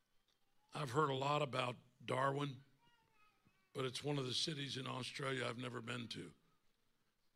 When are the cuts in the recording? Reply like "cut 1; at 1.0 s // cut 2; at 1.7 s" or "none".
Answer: none